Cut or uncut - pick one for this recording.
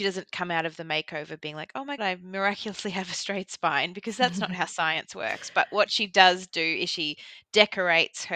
cut